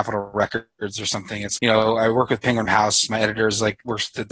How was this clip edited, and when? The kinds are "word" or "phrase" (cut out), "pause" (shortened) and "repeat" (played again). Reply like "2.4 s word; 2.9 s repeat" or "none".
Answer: 1.6 s word; 2.7 s word